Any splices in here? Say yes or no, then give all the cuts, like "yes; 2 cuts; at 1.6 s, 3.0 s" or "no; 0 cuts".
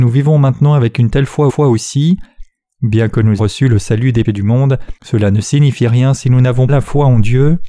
yes; 5 cuts; at 1.5 s, 3.4 s, 4.2 s, 5.0 s, 6.7 s